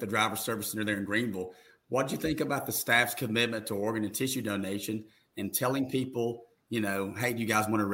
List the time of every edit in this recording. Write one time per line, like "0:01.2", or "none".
none